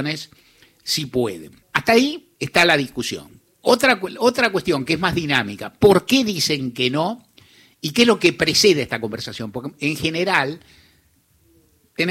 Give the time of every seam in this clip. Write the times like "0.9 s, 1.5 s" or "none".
1.6 s, 2.4 s, 3.5 s